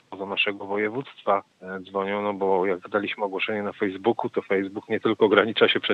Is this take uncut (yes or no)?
yes